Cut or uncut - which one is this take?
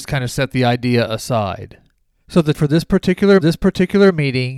cut